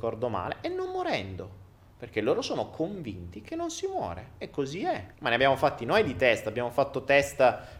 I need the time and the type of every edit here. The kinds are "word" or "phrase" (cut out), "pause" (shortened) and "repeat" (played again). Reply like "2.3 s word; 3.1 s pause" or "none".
5.1 s pause